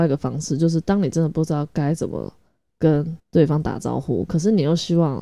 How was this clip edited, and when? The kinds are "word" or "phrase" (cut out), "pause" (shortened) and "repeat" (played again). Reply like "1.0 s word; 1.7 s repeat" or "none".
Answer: 3.2 s pause